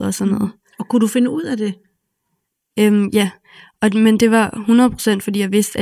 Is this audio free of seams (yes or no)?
yes